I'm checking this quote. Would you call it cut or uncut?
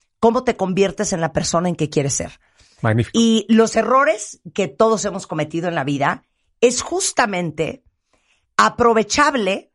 uncut